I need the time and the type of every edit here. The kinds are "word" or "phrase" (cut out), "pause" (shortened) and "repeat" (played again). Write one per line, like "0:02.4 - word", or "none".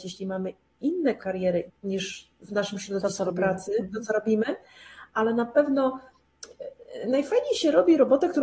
0:01.2 - word
0:01.7 - word

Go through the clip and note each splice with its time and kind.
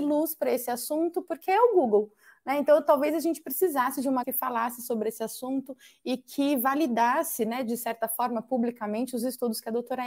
0:04.2 - phrase

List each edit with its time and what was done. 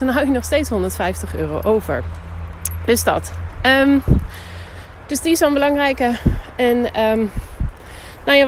none

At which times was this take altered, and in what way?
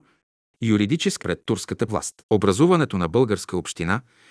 0:01.2 - word
0:01.9 - word
0:02.2 - pause

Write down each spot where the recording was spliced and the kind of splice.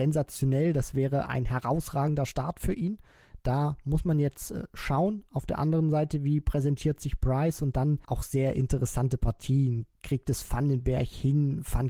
0:08.0 - pause
0:09.9 - pause

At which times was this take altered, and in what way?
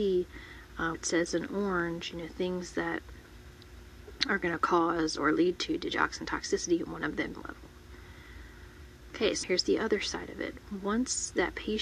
0:00.9 - word
0:07.3 - phrase
0:09.4 - word

